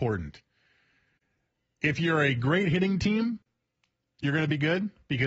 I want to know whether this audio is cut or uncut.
uncut